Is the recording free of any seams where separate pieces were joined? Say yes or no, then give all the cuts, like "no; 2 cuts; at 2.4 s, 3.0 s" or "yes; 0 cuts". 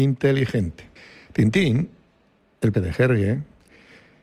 no; 2 cuts; at 1.0 s, 2.7 s